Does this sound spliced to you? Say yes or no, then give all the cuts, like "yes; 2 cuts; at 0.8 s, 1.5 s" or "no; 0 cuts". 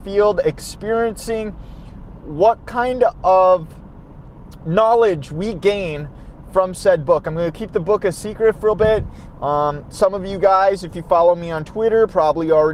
yes; 1 cut; at 8.7 s